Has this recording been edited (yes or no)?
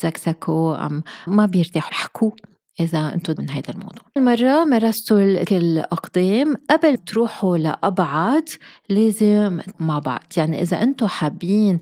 yes